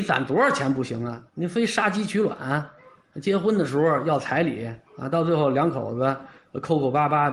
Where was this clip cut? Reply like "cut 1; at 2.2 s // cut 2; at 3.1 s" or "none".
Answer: cut 1; at 1.3 s // cut 2; at 4.9 s